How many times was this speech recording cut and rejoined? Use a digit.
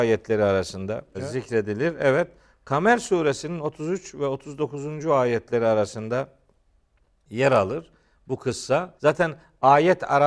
2